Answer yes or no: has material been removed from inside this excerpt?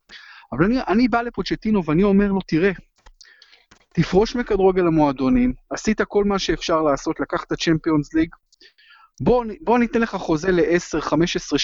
no